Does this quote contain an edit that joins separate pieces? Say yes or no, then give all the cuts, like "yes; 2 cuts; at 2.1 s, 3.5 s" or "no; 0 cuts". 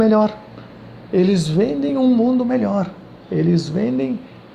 no; 0 cuts